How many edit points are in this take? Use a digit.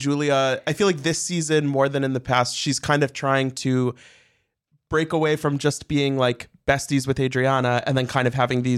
0